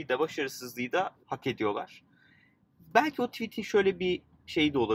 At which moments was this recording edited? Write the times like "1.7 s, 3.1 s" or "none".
1.2 s